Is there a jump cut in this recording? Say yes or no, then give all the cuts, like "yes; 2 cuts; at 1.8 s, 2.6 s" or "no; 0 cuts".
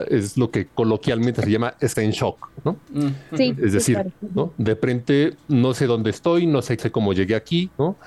yes; 2 cuts; at 1.9 s, 6.8 s